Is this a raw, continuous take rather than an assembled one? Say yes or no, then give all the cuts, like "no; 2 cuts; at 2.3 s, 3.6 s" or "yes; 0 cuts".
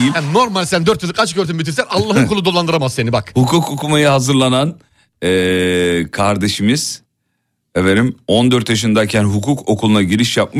yes; 0 cuts